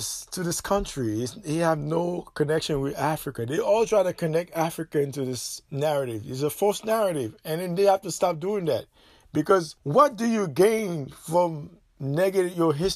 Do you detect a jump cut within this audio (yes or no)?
yes